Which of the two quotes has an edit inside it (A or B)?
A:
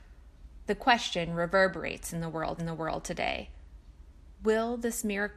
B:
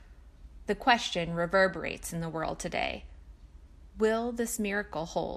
A